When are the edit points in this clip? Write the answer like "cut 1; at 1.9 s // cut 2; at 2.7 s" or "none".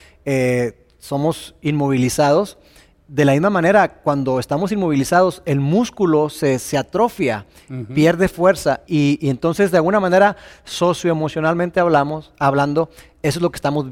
cut 1; at 8.9 s